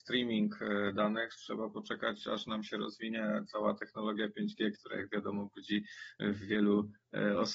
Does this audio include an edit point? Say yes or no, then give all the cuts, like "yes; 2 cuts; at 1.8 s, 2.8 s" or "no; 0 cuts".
no; 0 cuts